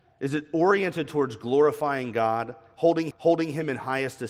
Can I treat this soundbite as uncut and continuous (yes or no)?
no